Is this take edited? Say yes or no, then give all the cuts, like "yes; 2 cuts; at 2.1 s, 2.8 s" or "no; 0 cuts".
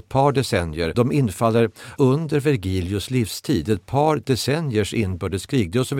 yes; 2 cuts; at 0.9 s, 2.0 s